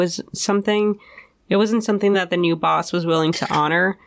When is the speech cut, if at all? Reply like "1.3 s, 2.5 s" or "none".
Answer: none

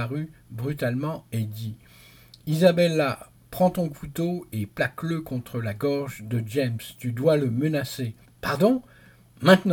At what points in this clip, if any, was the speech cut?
8.2 s

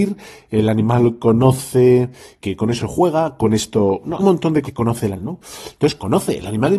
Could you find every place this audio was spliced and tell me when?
2.4 s, 2.8 s, 4.2 s, 4.6 s, 5.2 s

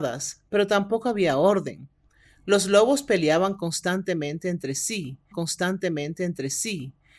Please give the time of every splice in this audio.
5.3 s

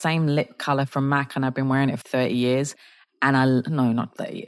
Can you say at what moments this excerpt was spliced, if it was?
2.0 s

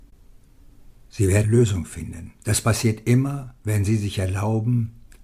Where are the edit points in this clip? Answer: 1.0 s, 1.4 s, 2.4 s, 3.6 s

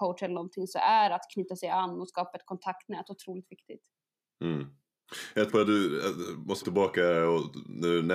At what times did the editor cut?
5.5 s, 6.6 s

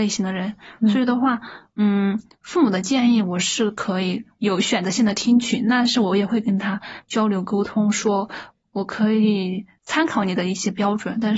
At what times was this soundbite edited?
none

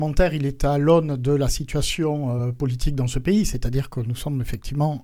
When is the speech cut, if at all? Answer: none

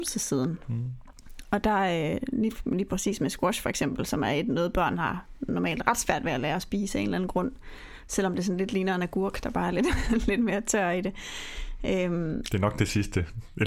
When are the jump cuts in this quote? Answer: none

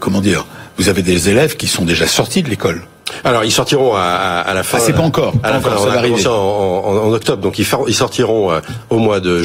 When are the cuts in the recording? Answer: none

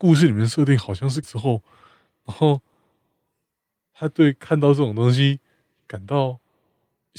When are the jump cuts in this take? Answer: 1.2 s

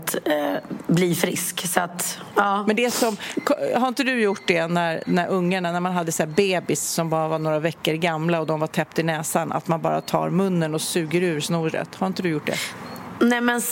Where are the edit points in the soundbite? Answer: none

